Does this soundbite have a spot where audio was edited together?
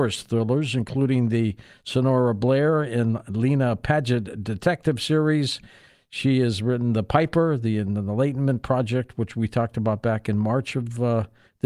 no; 0 cuts

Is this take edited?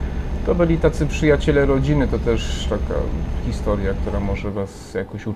no; 0 cuts

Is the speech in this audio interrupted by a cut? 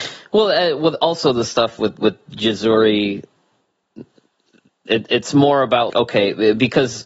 yes; 1 cut; at 5.9 s

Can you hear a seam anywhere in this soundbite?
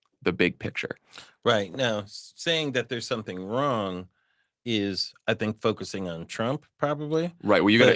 no; 0 cuts

